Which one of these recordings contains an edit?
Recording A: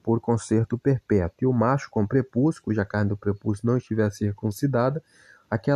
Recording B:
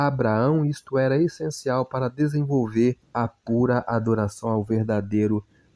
B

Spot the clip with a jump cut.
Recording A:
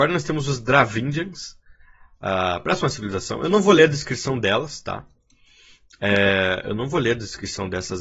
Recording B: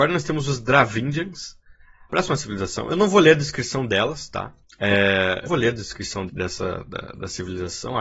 B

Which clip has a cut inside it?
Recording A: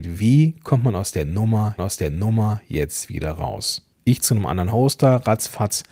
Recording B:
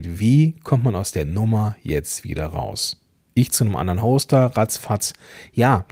A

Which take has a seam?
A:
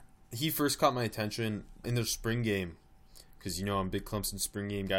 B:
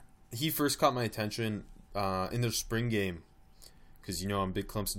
A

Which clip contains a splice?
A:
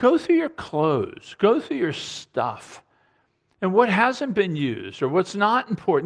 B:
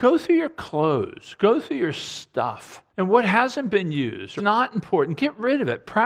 B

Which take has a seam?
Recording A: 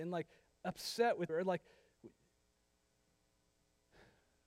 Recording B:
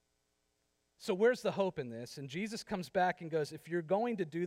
A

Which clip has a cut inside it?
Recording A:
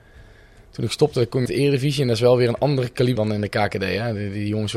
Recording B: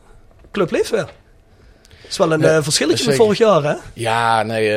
A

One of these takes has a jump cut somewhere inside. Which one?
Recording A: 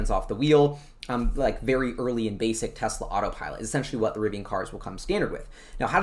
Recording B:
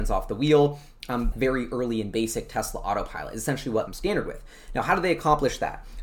B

